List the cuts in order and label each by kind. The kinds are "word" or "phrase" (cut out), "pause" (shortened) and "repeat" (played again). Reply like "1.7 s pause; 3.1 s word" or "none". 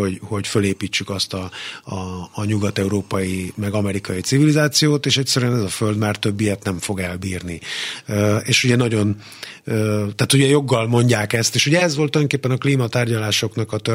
none